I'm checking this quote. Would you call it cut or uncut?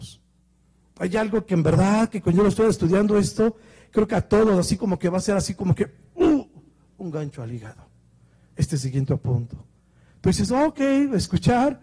uncut